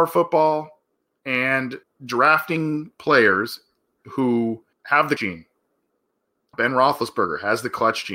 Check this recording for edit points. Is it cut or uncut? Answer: cut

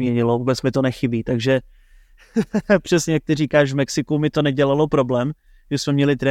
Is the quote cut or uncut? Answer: uncut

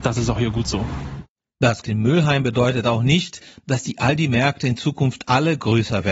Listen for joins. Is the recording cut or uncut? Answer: cut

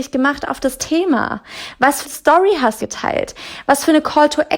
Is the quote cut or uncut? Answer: cut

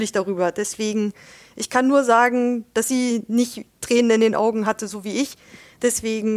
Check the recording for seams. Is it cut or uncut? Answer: uncut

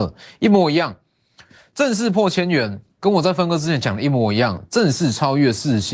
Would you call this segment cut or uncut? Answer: uncut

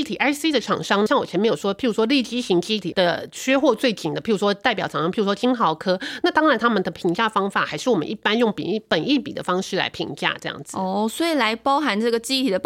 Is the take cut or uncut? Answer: cut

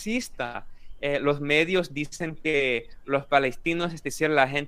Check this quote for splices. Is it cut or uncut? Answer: uncut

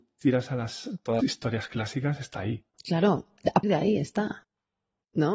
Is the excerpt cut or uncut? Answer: cut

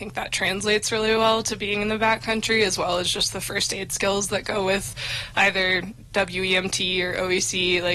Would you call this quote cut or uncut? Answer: uncut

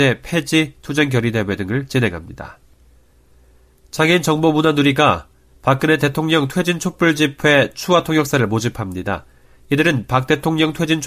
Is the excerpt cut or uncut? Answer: uncut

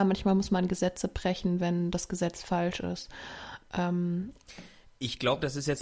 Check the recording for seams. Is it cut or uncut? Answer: uncut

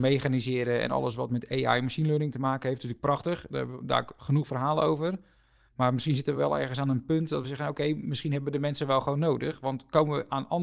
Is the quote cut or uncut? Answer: uncut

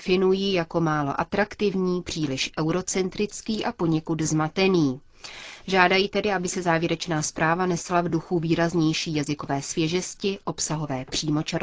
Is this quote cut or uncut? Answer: uncut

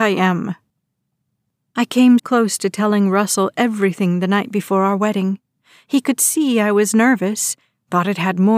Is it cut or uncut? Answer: cut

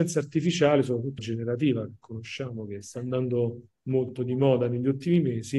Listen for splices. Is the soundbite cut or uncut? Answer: cut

